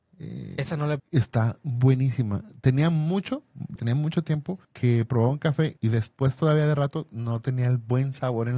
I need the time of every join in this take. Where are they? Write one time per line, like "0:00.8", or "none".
0:01.0
0:03.8
0:04.6
0:05.8